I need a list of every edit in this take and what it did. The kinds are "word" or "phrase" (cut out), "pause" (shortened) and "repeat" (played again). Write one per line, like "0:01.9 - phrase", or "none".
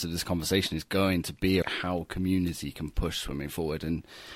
0:01.6 - phrase